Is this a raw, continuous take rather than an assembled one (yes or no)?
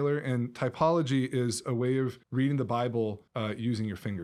no